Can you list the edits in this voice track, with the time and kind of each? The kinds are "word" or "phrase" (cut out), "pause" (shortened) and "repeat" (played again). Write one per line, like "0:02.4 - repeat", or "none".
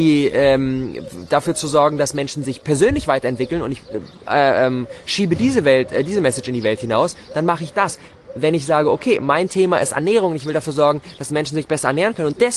none